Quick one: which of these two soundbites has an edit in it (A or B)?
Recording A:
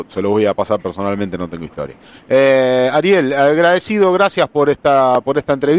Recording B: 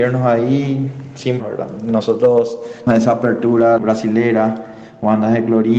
B